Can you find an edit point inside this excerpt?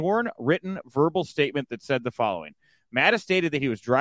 no; 0 cuts

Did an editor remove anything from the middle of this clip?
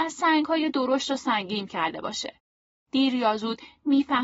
yes; 1 cut; at 1.7 s

